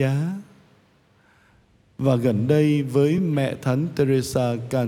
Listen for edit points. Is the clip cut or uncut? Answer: uncut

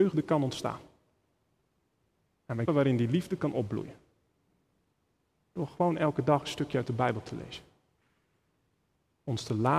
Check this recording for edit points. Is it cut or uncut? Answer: cut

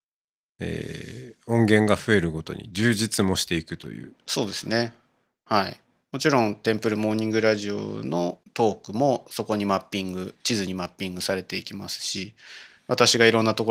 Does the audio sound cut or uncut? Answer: cut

